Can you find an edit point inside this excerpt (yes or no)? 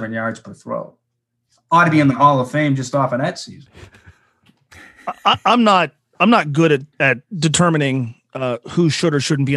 yes